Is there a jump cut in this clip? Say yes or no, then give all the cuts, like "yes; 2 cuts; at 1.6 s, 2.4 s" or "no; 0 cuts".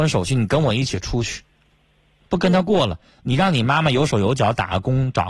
no; 0 cuts